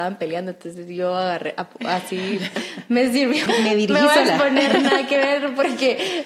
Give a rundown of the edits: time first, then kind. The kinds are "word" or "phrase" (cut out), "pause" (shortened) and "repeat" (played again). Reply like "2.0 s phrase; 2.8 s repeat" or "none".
3.5 s word